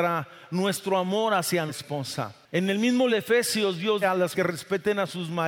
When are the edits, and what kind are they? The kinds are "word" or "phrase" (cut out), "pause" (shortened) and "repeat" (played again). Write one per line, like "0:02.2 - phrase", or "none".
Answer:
0:01.7 - word
0:03.1 - word
0:04.0 - word
0:04.3 - word